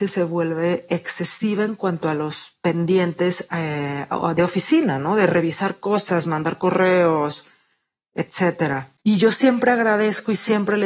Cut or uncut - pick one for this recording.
cut